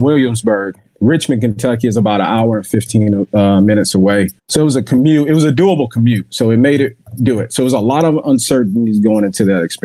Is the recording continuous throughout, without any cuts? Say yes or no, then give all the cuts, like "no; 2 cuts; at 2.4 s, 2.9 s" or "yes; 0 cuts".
no; 1 cut; at 4.4 s